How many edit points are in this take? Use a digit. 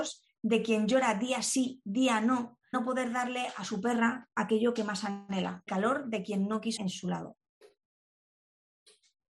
3